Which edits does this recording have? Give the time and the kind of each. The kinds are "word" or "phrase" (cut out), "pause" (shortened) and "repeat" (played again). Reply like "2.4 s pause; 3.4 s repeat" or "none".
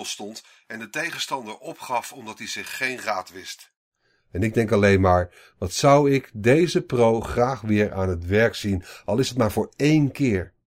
none